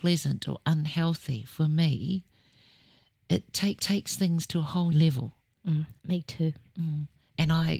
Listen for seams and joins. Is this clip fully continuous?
no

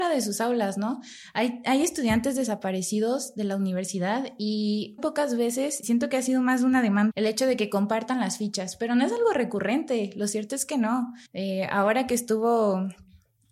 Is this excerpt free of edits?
no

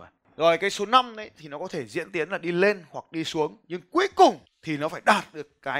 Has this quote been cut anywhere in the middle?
yes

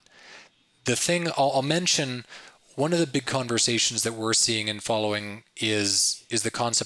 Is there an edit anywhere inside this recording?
no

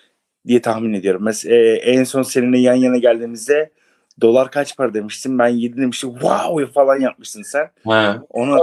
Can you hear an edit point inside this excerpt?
no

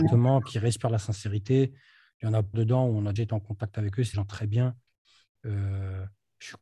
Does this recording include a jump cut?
yes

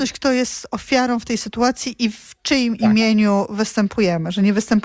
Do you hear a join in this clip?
no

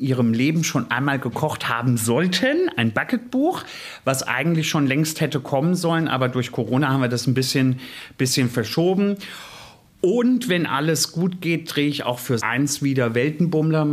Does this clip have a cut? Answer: yes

